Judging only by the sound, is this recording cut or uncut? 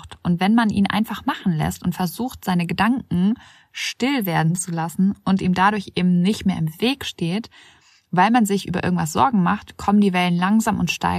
uncut